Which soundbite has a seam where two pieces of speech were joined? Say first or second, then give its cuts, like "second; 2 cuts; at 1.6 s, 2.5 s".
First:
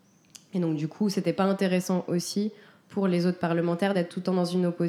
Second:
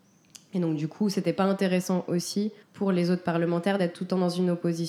second; 1 cut; at 2.6 s